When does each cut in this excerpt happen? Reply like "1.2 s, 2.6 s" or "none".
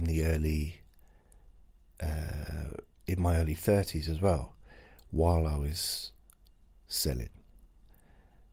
none